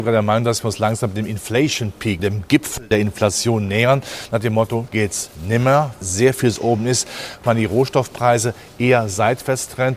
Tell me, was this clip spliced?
yes; 4 cuts; at 2.2 s, 4.9 s, 6.0 s, 7.4 s

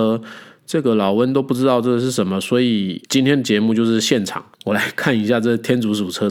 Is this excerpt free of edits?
no; 2 cuts; at 3.1 s, 4.5 s

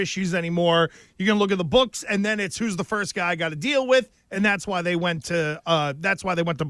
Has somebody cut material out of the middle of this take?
no; 0 cuts

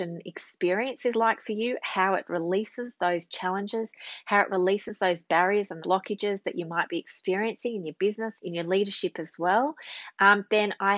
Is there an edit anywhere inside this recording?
yes; 2 cuts; at 5.8 s, 8.4 s

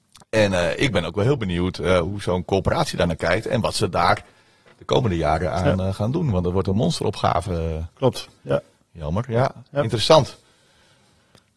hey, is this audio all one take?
yes; 0 cuts

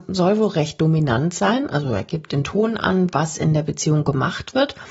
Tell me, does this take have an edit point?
no; 0 cuts

